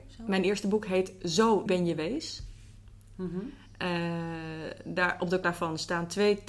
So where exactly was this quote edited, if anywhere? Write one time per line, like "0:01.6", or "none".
0:01.7
0:05.4